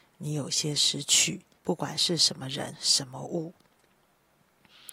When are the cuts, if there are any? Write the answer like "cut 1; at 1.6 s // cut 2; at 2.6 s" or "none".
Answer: cut 1; at 1.5 s // cut 2; at 2.7 s